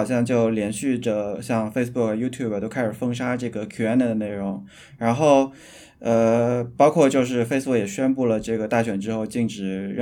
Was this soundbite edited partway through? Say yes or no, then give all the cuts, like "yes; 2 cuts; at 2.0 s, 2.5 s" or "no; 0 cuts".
no; 0 cuts